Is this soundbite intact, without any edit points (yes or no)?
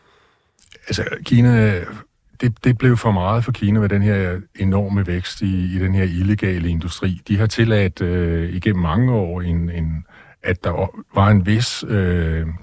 yes